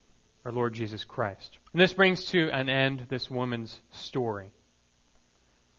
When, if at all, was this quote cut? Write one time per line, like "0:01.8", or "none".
0:01.7